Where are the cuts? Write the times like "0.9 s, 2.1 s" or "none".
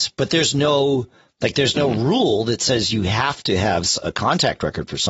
none